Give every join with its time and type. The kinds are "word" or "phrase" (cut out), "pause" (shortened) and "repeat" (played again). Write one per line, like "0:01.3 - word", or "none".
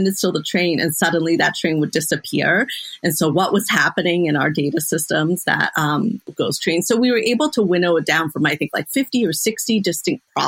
none